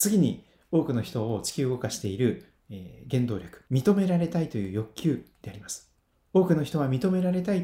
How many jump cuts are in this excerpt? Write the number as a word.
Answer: two